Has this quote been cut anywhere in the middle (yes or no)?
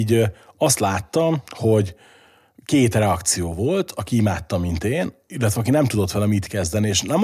no